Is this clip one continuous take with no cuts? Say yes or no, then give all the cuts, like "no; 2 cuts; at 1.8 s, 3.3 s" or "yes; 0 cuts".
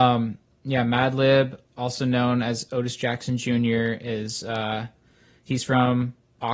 yes; 0 cuts